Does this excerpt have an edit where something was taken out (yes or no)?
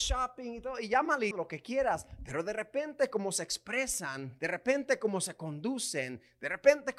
yes